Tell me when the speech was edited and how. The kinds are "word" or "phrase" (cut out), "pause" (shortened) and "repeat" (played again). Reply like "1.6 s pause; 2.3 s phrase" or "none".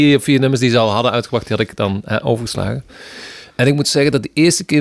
3.5 s pause